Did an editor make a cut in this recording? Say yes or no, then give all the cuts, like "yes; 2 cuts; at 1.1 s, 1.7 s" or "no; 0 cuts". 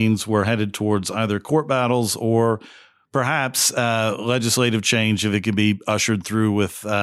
no; 0 cuts